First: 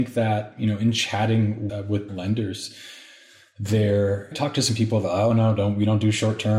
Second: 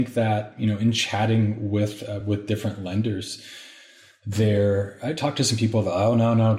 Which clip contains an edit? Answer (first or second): first